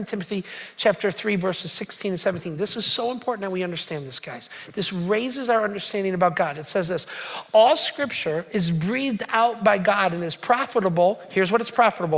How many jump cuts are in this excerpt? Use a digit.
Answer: 0